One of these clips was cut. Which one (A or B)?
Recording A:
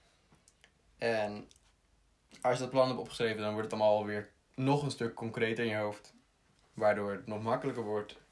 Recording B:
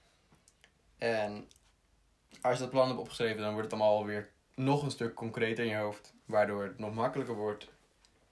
B